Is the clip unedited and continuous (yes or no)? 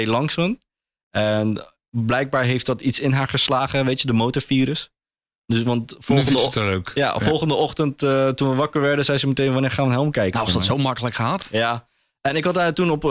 yes